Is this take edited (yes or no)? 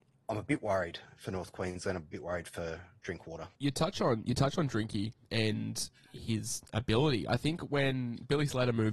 yes